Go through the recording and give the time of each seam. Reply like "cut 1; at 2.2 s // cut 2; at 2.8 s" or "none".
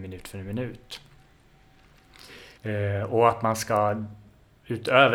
cut 1; at 2.6 s